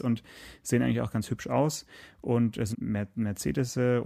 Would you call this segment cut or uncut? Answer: cut